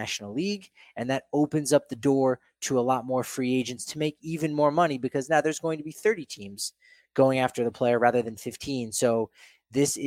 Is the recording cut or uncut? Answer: uncut